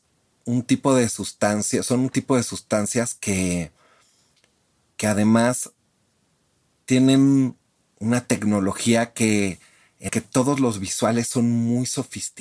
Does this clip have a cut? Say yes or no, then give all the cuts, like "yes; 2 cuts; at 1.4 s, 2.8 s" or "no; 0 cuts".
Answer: yes; 1 cut; at 10.1 s